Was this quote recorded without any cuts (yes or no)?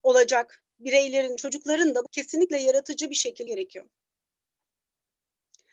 no